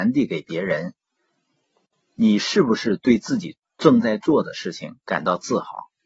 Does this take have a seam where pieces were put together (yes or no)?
no